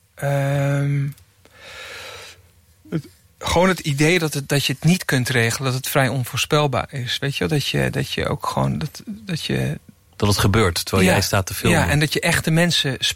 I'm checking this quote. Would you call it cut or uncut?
uncut